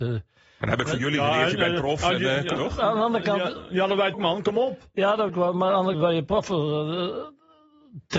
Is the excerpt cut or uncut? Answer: cut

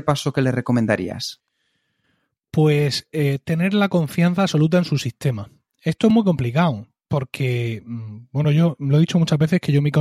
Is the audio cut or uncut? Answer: uncut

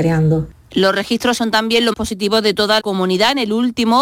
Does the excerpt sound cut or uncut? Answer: cut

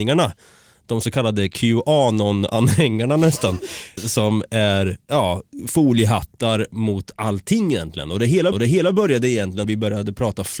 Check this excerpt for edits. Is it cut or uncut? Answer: cut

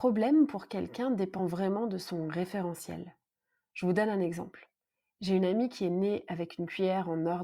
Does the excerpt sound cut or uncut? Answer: uncut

